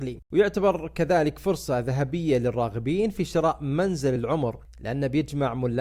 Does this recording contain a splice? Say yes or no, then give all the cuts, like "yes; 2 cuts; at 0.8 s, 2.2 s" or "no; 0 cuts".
no; 0 cuts